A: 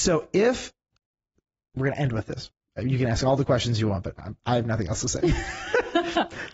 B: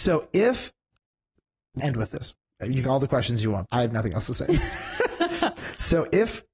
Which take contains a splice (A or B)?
B